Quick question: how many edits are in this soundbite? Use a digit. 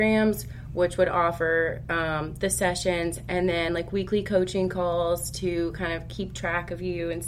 0